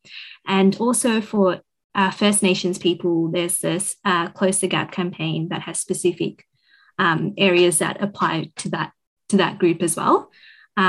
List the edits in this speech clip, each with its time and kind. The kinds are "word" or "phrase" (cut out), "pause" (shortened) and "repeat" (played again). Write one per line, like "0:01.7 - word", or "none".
none